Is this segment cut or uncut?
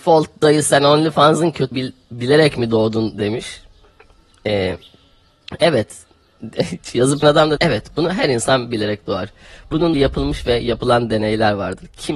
cut